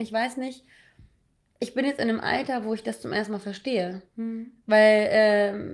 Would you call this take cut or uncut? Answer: uncut